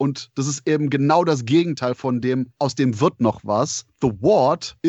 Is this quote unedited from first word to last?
yes; 0 cuts

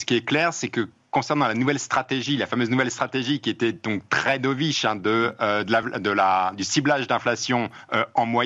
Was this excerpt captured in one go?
yes; 0 cuts

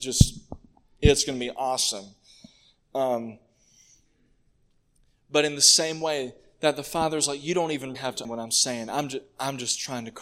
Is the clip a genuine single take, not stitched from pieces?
no; 2 cuts; at 7.9 s, 8.2 s

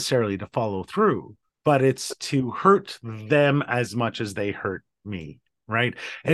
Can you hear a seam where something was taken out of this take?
yes; 1 cut; at 1.5 s

